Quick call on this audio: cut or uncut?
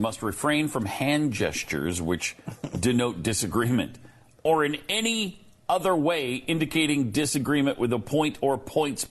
uncut